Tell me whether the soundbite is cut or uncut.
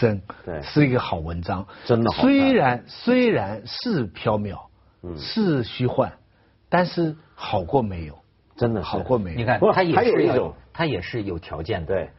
uncut